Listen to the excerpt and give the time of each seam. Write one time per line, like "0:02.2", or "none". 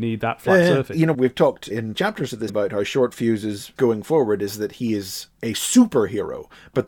0:01.9
0:02.5
0:03.8